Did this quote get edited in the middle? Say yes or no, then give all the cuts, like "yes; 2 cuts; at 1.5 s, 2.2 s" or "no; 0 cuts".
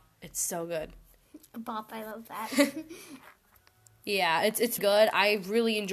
yes; 1 cut; at 4.8 s